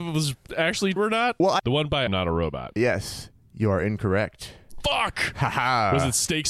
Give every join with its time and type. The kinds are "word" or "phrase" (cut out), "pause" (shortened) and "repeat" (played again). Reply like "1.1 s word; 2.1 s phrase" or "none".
1.0 s word; 1.6 s word; 2.1 s word; 2.8 s word